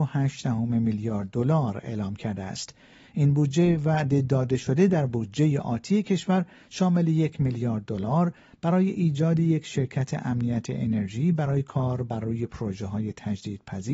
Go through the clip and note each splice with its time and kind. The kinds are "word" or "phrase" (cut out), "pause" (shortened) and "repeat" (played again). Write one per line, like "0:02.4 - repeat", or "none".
none